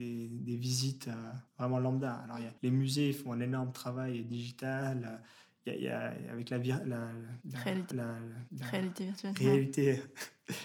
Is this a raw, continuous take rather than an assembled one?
no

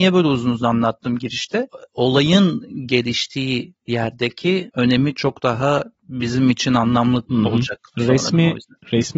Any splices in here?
no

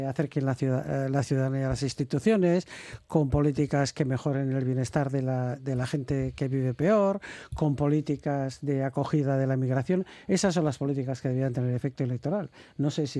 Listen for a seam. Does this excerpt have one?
no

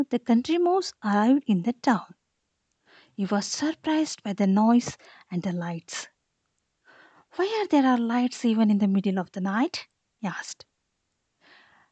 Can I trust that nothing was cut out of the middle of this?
yes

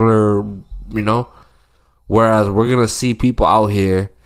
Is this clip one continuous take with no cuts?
yes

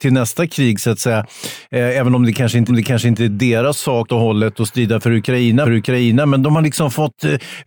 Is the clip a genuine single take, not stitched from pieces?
no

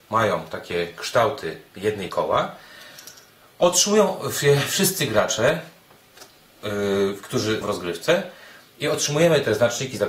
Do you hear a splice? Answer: yes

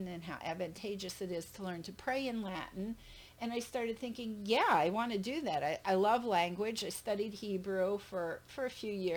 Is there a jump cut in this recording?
no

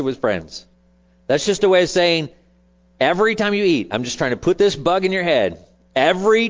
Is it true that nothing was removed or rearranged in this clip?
yes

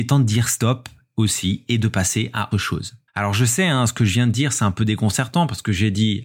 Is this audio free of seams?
no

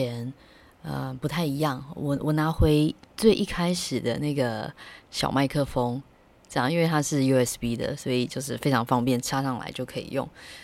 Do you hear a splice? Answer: no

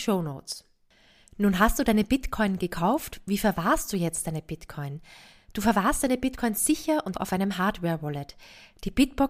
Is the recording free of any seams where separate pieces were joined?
no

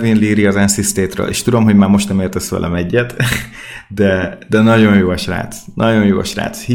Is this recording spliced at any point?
no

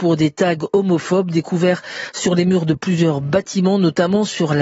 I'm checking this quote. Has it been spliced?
no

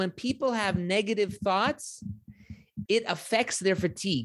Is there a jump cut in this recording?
yes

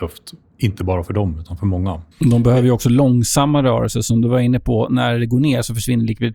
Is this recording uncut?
no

